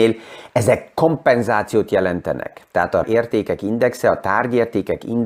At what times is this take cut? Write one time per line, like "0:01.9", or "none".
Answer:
0:03.0